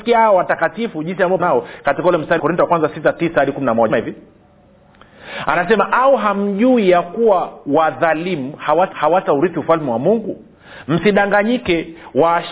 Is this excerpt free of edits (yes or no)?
no